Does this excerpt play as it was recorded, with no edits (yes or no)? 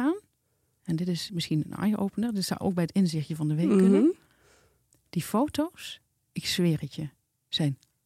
yes